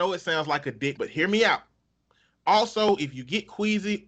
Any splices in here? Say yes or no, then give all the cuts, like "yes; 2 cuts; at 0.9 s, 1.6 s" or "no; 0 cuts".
yes; 1 cut; at 1.0 s